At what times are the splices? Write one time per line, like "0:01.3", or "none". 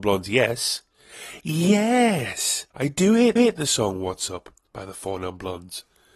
0:02.7
0:03.4
0:04.6